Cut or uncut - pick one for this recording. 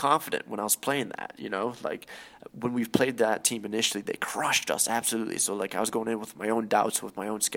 uncut